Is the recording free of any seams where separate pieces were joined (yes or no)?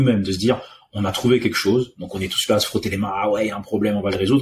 yes